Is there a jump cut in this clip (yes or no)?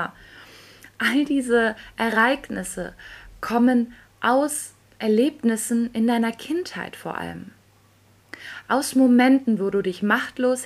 no